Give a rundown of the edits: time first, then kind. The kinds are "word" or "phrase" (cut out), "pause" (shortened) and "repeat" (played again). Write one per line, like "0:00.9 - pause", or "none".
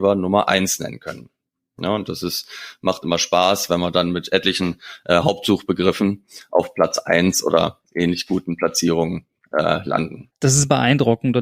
none